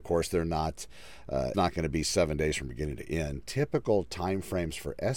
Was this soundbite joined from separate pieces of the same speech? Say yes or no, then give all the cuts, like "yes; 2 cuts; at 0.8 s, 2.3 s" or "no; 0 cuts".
yes; 1 cut; at 1.5 s